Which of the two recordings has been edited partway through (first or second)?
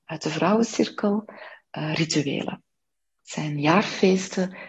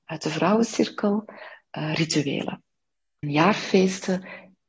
second